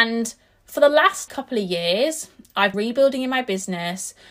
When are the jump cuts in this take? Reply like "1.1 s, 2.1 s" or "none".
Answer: 1.3 s, 2.7 s